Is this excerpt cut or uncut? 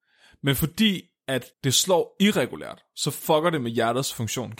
cut